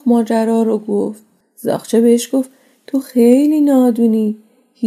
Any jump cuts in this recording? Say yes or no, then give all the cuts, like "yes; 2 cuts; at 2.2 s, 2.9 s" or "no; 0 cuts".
no; 0 cuts